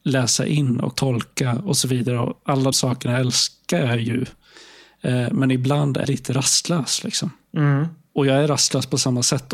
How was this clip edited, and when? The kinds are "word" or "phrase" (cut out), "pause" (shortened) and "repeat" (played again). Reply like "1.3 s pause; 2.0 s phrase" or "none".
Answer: 0.9 s phrase; 2.7 s word; 6.0 s word

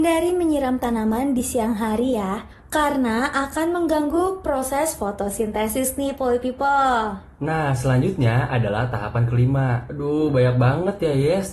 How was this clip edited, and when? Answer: none

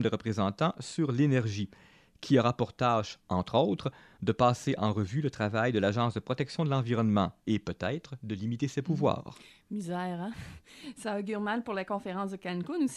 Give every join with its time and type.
none

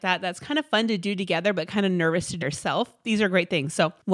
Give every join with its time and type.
2.4 s word

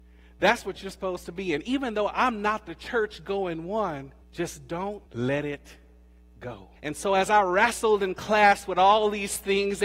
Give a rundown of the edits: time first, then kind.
4.2 s pause; 5.1 s pause; 6.8 s pause

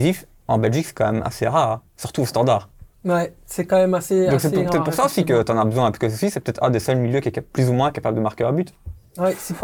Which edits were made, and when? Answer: 2.9 s pause

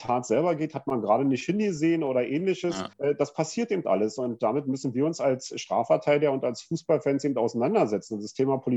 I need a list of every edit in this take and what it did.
2.9 s pause

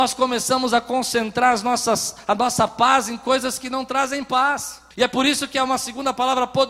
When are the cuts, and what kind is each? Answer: 4.9 s pause

